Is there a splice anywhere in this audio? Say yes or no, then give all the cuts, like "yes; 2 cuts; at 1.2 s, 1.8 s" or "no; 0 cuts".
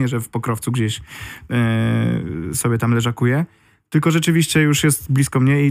no; 0 cuts